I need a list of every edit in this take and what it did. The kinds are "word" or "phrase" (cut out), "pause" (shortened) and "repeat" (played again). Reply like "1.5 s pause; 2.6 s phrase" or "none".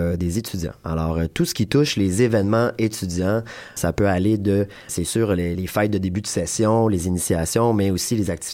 3.8 s word; 4.9 s word; 5.5 s word